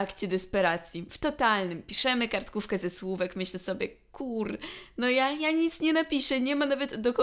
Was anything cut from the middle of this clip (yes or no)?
no